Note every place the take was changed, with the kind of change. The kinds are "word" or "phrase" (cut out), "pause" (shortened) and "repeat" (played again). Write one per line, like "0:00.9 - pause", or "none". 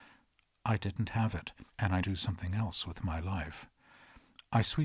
0:01.7 - pause
0:02.0 - phrase